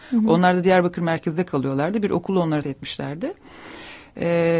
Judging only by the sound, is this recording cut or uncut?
cut